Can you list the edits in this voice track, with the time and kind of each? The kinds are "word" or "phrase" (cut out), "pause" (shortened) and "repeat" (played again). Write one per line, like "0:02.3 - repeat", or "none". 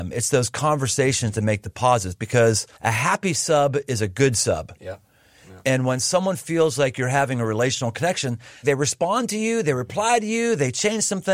0:02.7 - pause
0:08.6 - word